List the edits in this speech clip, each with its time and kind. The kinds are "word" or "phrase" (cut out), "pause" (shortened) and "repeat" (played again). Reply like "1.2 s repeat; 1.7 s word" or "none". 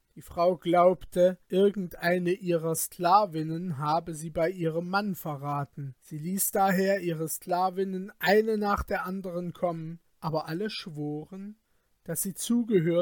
1.4 s pause; 6.0 s pause; 10.1 s pause